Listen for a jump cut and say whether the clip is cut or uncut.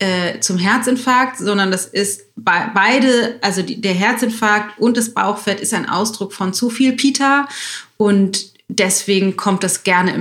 uncut